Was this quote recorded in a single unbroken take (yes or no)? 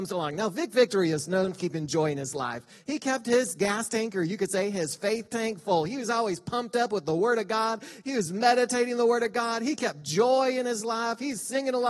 no